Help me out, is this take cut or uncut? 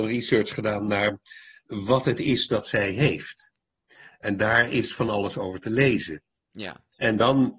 uncut